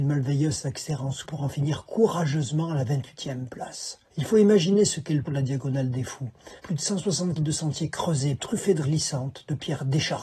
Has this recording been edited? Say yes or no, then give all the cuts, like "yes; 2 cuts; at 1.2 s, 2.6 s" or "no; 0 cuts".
yes; 7 cuts; at 1.2 s, 4.1 s, 5.2 s, 6.6 s, 7.4 s, 8.4 s, 8.8 s